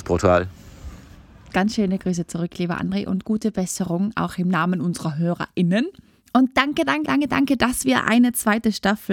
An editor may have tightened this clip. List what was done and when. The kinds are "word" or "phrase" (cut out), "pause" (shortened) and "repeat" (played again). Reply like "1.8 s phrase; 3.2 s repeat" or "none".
7.1 s word